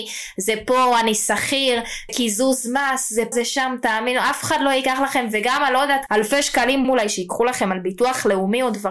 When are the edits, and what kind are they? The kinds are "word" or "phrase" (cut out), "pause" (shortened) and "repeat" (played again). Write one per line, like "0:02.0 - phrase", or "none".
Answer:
0:02.1 - word
0:03.3 - word
0:06.1 - word
0:06.8 - word